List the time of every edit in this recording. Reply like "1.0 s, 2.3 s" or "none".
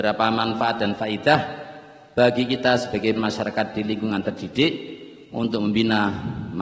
3.2 s